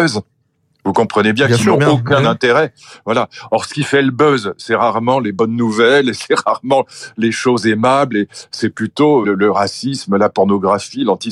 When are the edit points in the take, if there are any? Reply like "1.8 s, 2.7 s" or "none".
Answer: 9.2 s